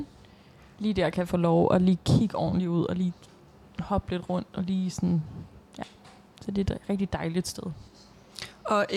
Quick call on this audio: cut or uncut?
uncut